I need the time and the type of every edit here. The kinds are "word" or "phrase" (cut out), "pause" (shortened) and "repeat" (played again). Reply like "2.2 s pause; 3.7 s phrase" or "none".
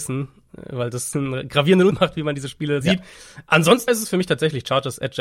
1.1 s word; 1.9 s word; 2.8 s word; 3.9 s word

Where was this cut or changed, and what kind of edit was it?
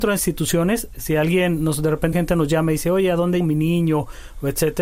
2.1 s word; 3.4 s word

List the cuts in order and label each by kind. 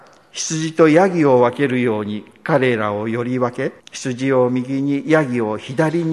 3.8 s pause

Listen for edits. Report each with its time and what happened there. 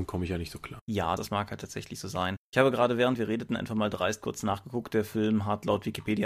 1.2 s word

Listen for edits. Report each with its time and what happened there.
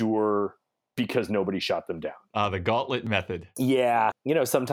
none

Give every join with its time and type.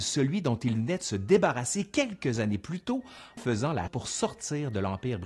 3.4 s word; 3.9 s word

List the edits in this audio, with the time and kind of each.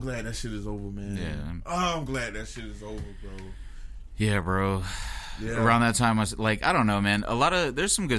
none

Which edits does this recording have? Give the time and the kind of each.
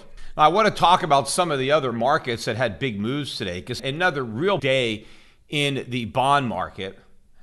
3.8 s word; 4.6 s word

